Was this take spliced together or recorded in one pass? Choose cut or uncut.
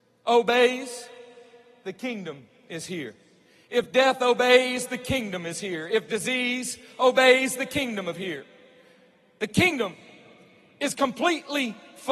uncut